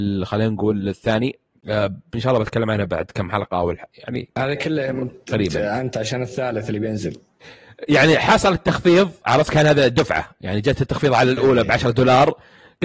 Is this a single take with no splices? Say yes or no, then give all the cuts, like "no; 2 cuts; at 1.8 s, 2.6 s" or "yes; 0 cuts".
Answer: no; 1 cut; at 1.5 s